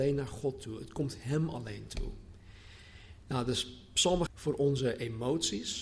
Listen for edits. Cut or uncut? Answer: cut